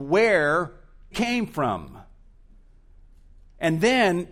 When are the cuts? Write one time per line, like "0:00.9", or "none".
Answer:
0:01.1